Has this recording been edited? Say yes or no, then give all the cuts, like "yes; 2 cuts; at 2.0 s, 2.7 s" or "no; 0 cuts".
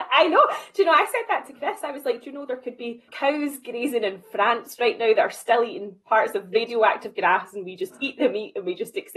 yes; 1 cut; at 3.1 s